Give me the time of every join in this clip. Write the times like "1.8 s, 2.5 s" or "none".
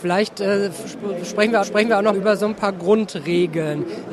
1.6 s, 2.1 s